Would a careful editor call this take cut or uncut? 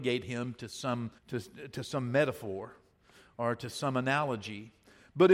cut